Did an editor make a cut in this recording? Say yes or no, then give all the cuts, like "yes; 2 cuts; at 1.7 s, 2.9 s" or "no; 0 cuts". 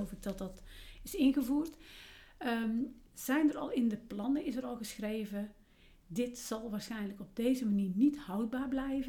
yes; 1 cut; at 3.1 s